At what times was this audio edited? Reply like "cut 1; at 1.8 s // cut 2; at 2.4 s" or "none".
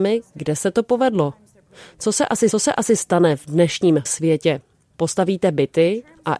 cut 1; at 2.5 s // cut 2; at 4.1 s